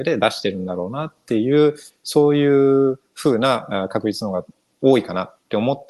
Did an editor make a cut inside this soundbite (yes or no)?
no